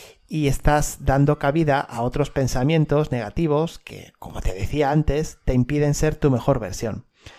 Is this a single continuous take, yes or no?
yes